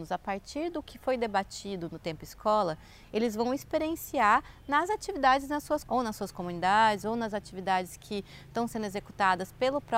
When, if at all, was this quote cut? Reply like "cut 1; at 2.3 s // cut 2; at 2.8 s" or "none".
cut 1; at 5.8 s